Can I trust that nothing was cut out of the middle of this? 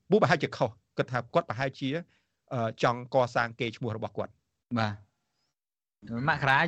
no; 1 cut; at 4.6 s

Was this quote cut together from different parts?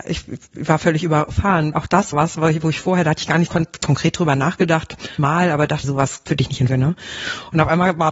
yes; 7 cuts; at 1.7 s, 2.1 s, 3.5 s, 5.2 s, 5.8 s, 6.3 s, 6.7 s

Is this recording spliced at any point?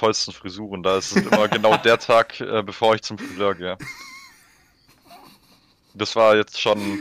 no; 0 cuts

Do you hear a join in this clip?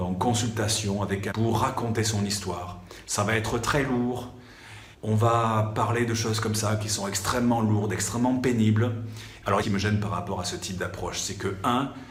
yes; 3 cuts; at 1.3 s, 4.9 s, 9.6 s

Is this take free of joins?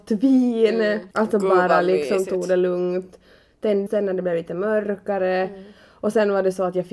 no; 2 cuts; at 1.1 s, 3.9 s

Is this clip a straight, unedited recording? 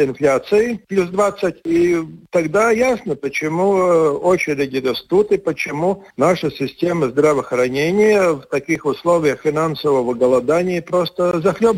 no; 1 cut; at 6.1 s

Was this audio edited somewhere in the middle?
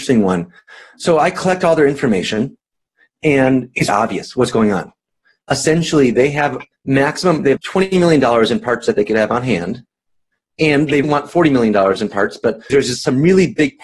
yes; 5 cuts; at 3.9 s, 6.7 s, 7.6 s, 11.0 s, 12.7 s

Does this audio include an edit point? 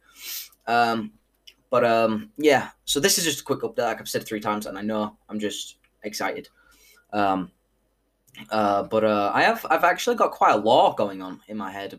no; 0 cuts

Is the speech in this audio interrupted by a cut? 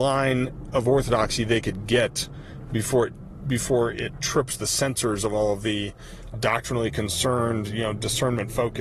yes; 1 cut; at 6.3 s

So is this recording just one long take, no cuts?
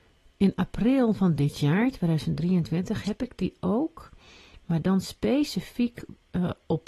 yes; 0 cuts

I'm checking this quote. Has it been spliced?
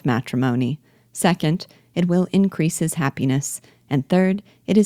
no; 0 cuts

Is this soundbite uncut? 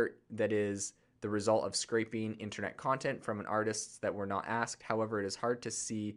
yes; 0 cuts

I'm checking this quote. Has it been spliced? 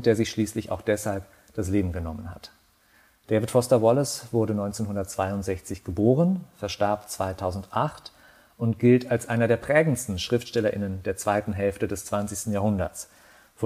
no; 0 cuts

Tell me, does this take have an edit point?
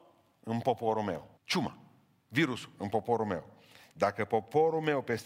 yes; 1 cut; at 1.4 s

